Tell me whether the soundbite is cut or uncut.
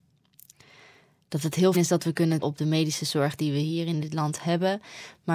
cut